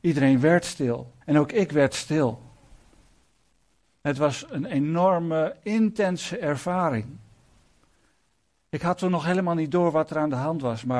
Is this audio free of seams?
no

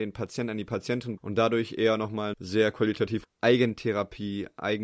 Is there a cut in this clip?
yes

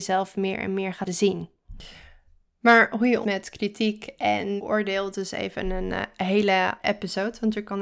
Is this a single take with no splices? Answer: no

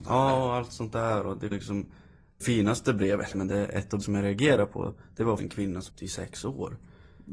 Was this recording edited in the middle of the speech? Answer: yes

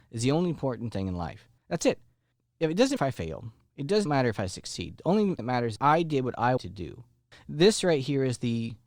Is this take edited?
yes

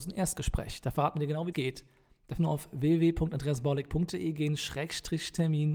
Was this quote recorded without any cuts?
no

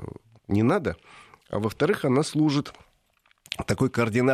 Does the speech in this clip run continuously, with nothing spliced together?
yes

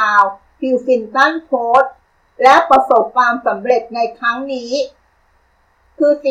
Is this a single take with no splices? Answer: no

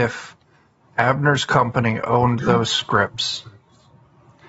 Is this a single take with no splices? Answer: yes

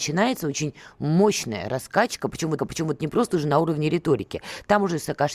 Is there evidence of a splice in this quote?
yes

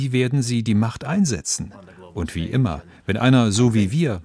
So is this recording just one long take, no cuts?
yes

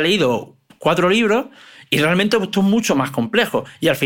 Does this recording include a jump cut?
no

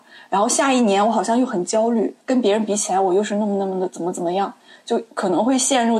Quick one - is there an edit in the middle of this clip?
yes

